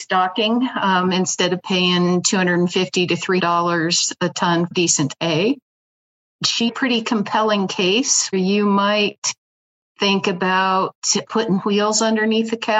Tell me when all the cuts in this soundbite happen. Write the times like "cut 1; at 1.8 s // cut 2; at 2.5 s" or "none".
cut 1; at 3.4 s // cut 2; at 4.7 s // cut 3; at 6.7 s // cut 4; at 8.3 s // cut 5; at 11.3 s